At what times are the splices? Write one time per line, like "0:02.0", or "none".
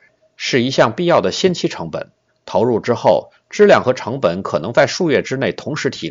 0:02.3